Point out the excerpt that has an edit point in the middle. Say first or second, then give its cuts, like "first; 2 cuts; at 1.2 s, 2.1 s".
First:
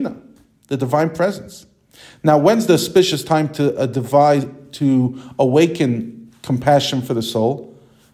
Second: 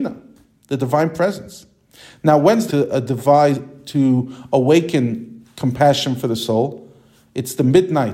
second; 1 cut; at 2.7 s